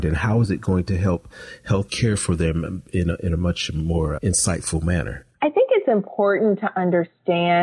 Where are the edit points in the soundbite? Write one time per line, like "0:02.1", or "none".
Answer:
0:01.9
0:04.2
0:05.3